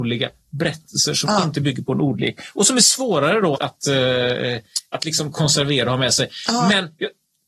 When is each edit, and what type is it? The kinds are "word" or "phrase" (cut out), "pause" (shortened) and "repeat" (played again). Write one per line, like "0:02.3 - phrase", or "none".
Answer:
0:03.5 - word